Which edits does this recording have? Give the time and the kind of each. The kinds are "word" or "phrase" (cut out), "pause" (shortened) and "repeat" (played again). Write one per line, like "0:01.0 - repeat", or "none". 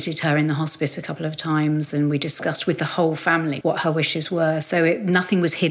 0:03.6 - word